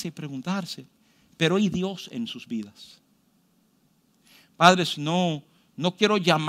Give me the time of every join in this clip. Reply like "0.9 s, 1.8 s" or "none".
none